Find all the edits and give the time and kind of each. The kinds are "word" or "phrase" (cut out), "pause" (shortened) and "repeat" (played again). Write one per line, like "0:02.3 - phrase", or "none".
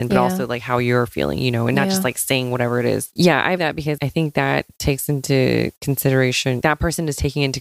0:03.6 - word
0:04.0 - word
0:06.6 - word